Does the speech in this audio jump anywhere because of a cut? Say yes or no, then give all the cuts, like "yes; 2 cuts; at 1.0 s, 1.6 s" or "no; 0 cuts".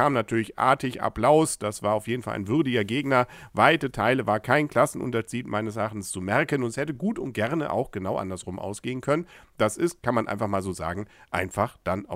no; 0 cuts